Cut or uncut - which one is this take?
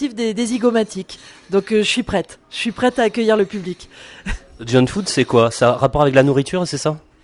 uncut